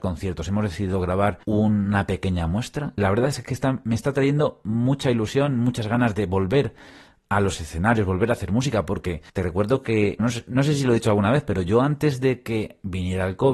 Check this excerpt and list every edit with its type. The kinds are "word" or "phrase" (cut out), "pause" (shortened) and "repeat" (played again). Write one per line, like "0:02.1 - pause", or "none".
0:01.4 - pause
0:03.0 - word
0:09.3 - pause
0:10.2 - word